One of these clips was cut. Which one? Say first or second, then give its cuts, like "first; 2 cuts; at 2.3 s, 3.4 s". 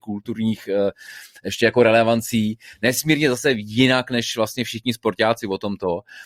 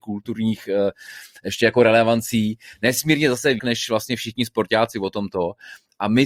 second; 1 cut; at 3.6 s